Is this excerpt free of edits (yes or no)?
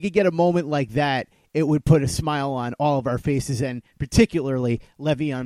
yes